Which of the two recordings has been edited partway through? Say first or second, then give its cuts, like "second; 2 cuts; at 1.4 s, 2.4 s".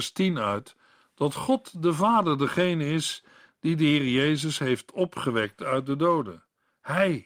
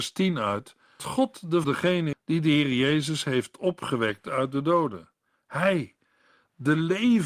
second; 3 cuts; at 1.0 s, 1.6 s, 2.1 s